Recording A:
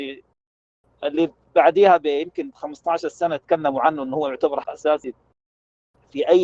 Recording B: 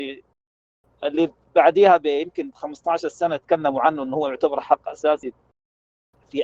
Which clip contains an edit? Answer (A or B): A